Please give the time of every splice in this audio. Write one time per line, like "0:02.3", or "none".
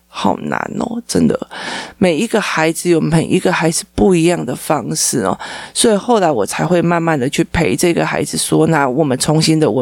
none